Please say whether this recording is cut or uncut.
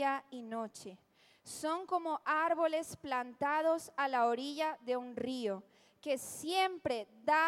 uncut